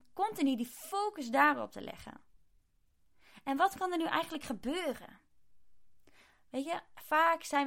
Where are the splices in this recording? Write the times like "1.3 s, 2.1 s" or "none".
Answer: none